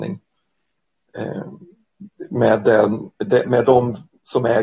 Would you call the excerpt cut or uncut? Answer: cut